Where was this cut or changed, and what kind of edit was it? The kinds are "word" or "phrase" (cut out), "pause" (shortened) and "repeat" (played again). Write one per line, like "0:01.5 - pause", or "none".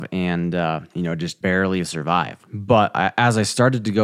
0:00.9 - pause
0:01.4 - word
0:02.4 - pause